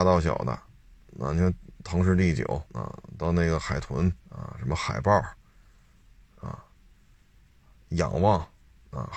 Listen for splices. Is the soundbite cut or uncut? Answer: cut